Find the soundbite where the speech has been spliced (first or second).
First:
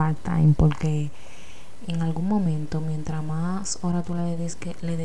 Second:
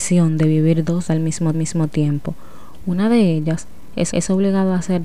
second